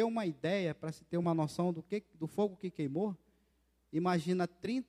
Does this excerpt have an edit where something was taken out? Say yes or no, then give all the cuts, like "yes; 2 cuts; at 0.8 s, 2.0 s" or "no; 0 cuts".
no; 0 cuts